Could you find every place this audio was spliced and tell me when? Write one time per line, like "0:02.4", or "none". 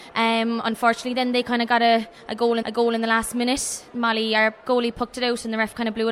0:02.6